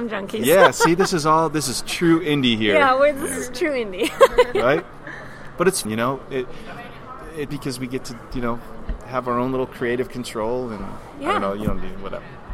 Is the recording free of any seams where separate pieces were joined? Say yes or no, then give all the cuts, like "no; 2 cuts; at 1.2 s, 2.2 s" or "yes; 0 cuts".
no; 2 cuts; at 5.9 s, 7.5 s